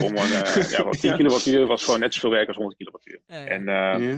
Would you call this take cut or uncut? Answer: uncut